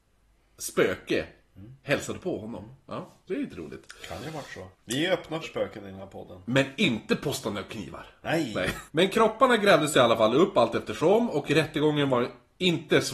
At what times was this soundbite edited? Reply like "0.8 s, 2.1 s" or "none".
4.7 s, 5.4 s, 8.9 s